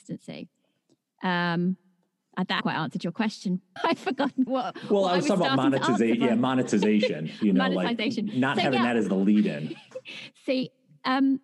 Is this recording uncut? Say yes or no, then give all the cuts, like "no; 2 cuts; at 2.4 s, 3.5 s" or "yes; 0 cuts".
no; 3 cuts; at 2.6 s, 3.8 s, 4.5 s